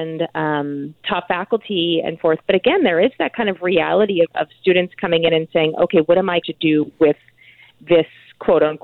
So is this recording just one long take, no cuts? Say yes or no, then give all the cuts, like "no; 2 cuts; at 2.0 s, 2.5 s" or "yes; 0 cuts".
no; 4 cuts; at 1.3 s, 2.2 s, 4.2 s, 6.4 s